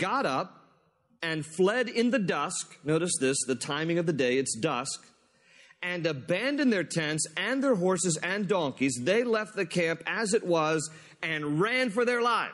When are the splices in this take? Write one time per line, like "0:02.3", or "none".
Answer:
none